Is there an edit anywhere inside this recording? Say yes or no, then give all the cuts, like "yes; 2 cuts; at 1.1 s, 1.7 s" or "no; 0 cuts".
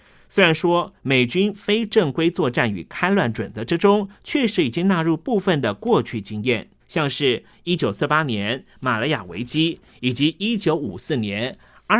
yes; 1 cut; at 6.8 s